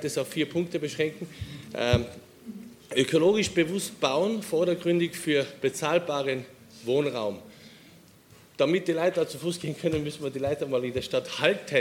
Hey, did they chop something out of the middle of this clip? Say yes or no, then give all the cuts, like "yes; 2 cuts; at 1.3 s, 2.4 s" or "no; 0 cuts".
no; 0 cuts